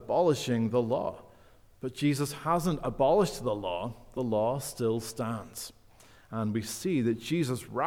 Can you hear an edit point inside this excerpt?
no; 0 cuts

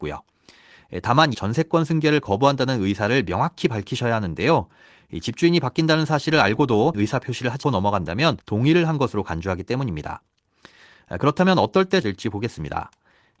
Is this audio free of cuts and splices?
no; 5 cuts; at 1.3 s, 6.9 s, 7.6 s, 8.4 s, 12.0 s

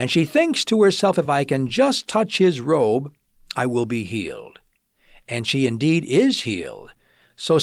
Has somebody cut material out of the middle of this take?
no; 0 cuts

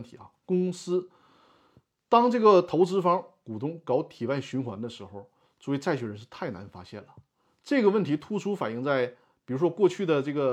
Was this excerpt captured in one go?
yes; 0 cuts

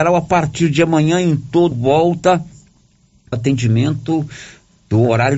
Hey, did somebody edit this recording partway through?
yes; 2 cuts; at 1.7 s, 3.3 s

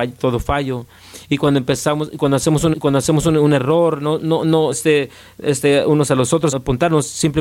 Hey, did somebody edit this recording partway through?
yes; 3 cuts; at 2.7 s, 4.7 s, 6.5 s

